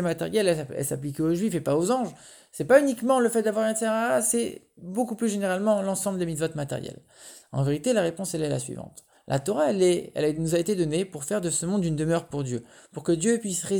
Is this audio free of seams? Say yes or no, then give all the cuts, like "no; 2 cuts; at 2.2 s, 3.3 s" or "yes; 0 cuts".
yes; 0 cuts